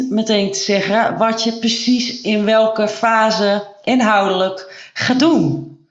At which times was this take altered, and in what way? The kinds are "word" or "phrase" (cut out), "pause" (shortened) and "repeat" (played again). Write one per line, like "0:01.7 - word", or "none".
none